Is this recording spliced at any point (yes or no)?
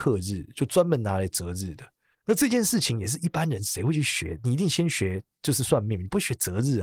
yes